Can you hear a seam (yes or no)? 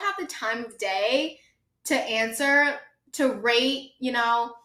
no